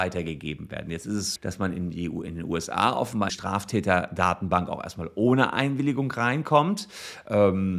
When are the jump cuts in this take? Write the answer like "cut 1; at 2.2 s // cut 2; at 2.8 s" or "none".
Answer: cut 1; at 1.4 s // cut 2; at 3.3 s